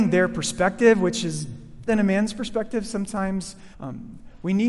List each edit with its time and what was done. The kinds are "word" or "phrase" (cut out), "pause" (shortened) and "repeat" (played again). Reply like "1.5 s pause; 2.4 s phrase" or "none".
1.9 s word; 3.7 s pause